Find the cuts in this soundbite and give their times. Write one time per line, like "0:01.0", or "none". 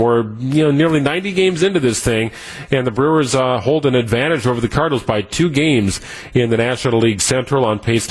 none